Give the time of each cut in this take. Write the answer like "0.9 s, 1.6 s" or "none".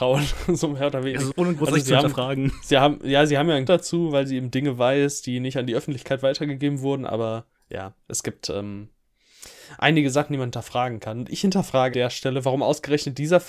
1.3 s, 3.7 s, 7.6 s, 11.9 s